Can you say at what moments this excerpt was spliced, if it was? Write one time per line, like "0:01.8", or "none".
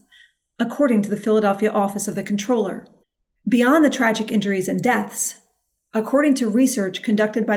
0:03.0